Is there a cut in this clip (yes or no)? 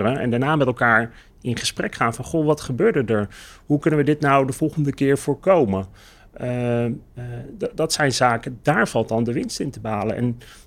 no